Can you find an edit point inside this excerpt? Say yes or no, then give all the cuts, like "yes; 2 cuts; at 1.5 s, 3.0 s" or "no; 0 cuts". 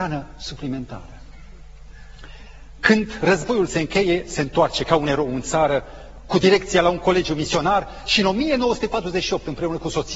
no; 0 cuts